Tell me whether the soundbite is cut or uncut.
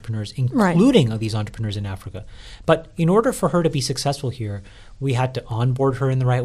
uncut